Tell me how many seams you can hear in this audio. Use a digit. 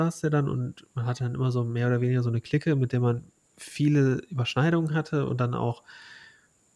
0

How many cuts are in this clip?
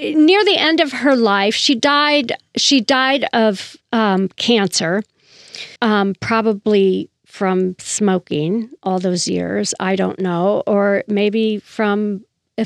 2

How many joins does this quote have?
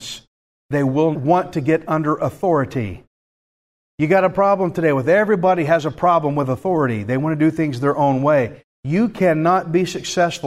1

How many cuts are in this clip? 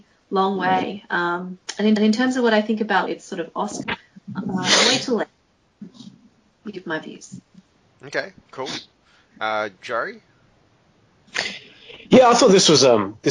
3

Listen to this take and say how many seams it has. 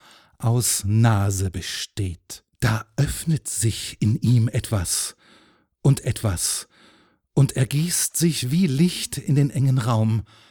2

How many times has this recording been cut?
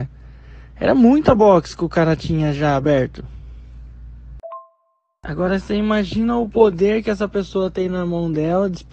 0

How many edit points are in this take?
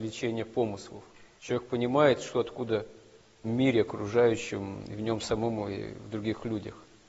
1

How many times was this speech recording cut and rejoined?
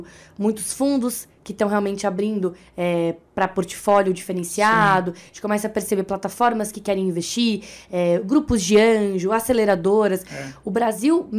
0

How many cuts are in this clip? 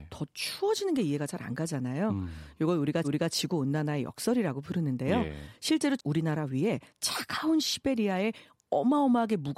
3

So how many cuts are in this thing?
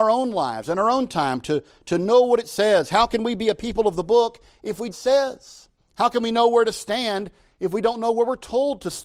2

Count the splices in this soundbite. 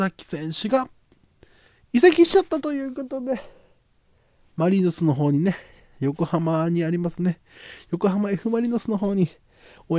0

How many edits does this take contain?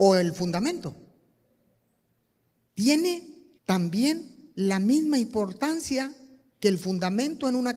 1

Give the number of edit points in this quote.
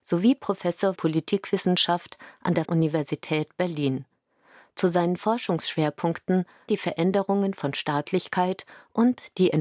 3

